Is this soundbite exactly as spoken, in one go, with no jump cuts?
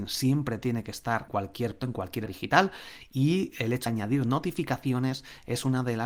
no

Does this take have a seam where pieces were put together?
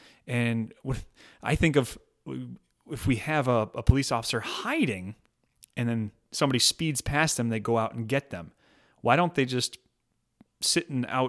no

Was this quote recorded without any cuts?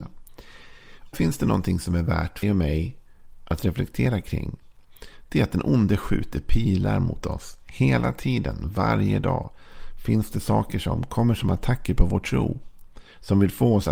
no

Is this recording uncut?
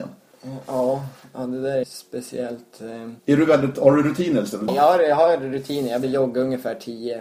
no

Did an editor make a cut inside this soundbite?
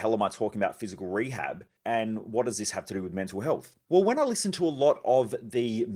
no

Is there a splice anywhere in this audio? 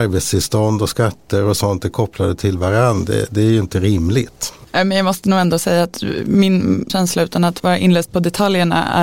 yes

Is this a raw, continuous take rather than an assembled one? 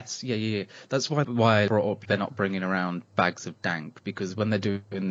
no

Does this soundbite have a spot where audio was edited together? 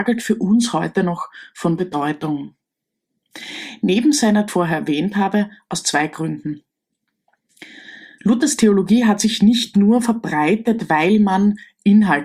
yes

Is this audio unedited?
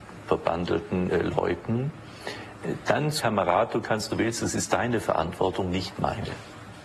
no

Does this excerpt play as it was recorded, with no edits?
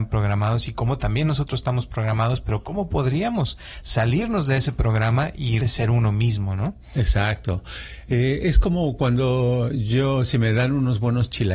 no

